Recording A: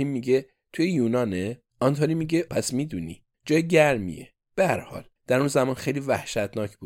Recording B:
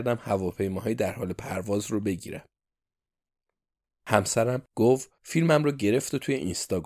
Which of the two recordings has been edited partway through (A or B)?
A